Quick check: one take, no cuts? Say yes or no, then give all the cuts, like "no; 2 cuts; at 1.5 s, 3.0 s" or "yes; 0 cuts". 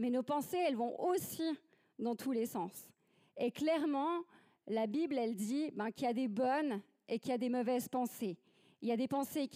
yes; 0 cuts